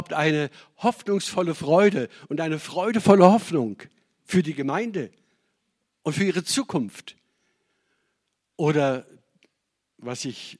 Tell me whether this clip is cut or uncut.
uncut